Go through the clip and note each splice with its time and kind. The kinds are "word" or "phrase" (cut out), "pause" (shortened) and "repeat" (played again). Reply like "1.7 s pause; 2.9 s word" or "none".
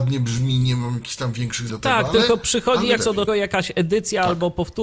1.7 s word; 3.0 s word; 3.3 s word